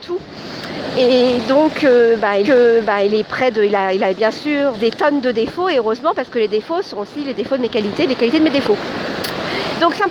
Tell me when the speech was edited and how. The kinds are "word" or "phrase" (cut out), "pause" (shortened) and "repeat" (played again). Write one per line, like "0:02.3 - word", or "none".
0:02.4 - repeat
0:04.7 - word